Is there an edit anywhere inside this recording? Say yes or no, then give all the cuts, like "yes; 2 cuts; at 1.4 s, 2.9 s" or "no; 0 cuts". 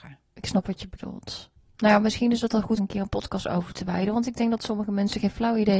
yes; 1 cut; at 2.8 s